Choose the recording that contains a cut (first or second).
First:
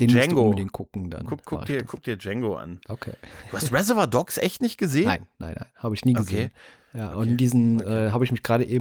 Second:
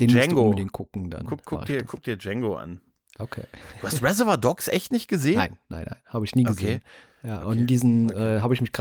first